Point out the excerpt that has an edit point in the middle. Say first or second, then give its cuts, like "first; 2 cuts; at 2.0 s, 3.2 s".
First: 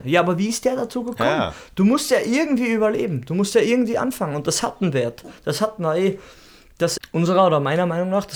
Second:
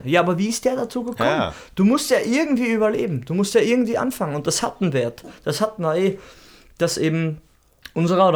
first; 1 cut; at 7.0 s